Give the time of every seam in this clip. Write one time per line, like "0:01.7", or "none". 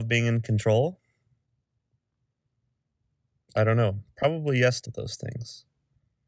0:04.8